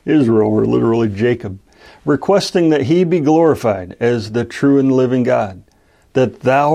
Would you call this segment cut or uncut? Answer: uncut